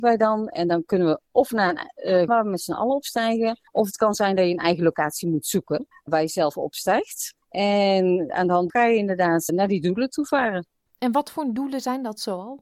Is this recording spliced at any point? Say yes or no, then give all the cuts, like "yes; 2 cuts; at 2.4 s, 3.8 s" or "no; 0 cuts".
yes; 6 cuts; at 2.3 s, 3.7 s, 5.9 s, 7.4 s, 8.7 s, 9.5 s